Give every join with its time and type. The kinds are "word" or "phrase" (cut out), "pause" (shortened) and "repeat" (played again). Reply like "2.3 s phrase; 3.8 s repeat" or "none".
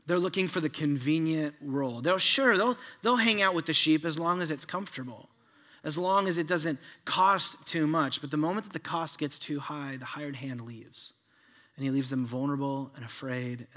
none